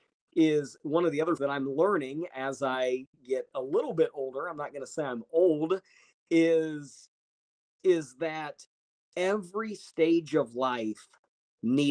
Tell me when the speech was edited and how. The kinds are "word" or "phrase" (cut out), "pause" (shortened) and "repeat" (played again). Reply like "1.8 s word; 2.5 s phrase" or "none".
1.4 s phrase